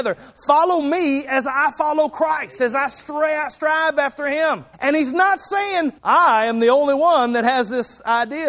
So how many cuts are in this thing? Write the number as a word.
two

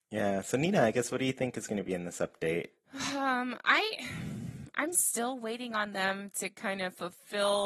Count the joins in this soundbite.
zero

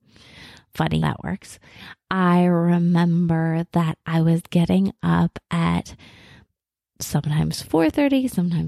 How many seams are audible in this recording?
one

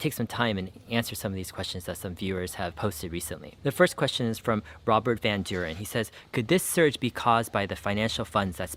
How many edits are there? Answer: zero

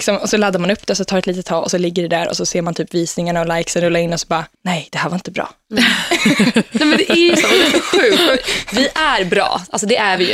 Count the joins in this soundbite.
one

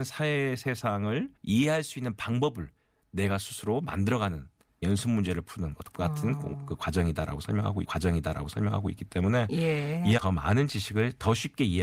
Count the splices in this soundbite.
four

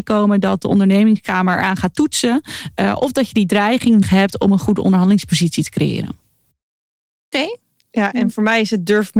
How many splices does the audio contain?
one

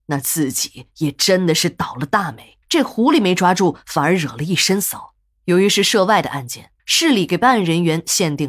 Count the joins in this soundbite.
three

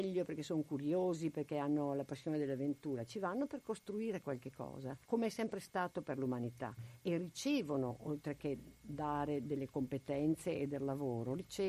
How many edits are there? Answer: one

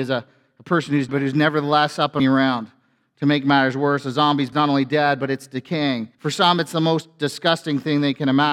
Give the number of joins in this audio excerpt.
four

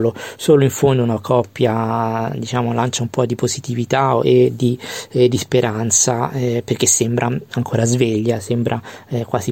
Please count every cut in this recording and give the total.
zero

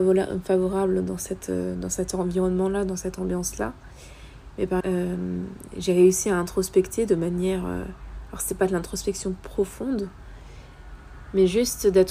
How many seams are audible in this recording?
one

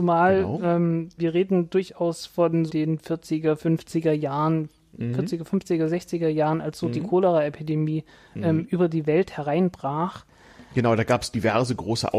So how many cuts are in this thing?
three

